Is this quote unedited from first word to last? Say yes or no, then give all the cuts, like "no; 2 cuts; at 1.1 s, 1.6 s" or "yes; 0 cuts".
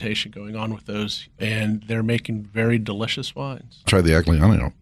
no; 2 cuts; at 1.4 s, 3.9 s